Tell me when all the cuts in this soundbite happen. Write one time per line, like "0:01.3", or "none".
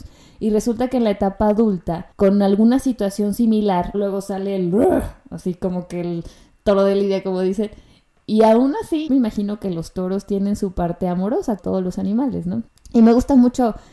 0:02.1
0:03.9
0:09.1
0:11.6
0:12.7